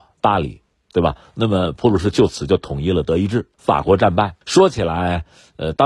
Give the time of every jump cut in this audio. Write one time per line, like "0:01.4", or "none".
0:03.5
0:04.4